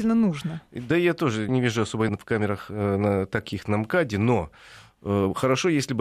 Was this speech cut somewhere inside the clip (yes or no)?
yes